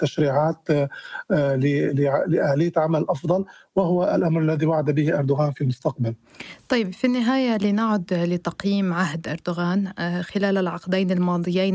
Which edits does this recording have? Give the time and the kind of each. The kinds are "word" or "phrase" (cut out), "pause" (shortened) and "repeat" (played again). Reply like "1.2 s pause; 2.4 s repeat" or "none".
none